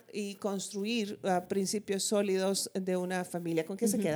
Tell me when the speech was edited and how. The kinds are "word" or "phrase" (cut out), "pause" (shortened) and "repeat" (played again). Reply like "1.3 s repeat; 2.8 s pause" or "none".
none